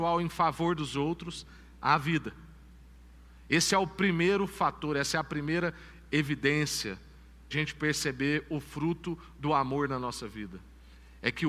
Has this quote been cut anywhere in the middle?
yes; 1 cut; at 7.5 s

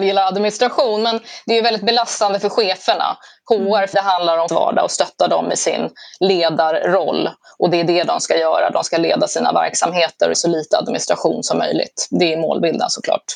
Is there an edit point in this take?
yes; 3 cuts; at 3.9 s, 4.5 s, 10.3 s

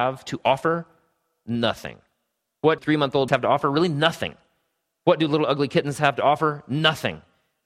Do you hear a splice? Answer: yes; 2 cuts; at 2.8 s, 3.3 s

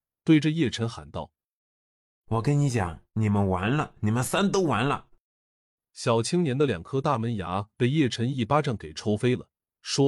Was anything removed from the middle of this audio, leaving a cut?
no; 0 cuts

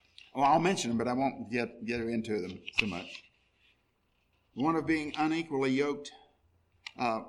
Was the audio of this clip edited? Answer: no; 0 cuts

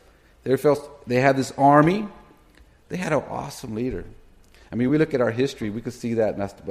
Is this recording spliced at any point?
no; 0 cuts

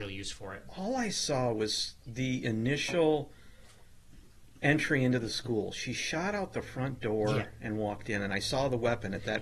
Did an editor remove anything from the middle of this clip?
no; 0 cuts

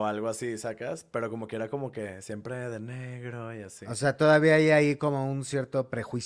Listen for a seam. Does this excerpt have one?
no; 0 cuts

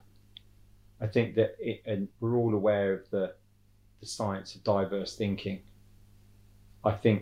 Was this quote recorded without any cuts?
no; 1 cut; at 2.1 s

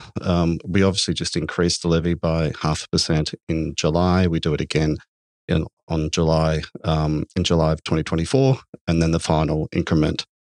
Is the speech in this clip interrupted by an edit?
no; 0 cuts

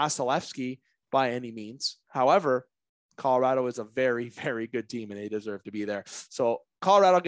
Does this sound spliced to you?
no; 0 cuts

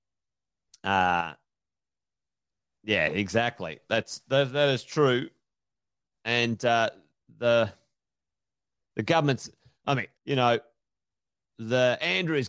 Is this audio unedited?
no; 1 cut; at 10.2 s

